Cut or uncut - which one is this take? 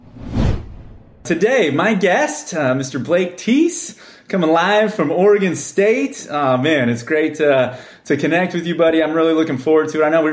uncut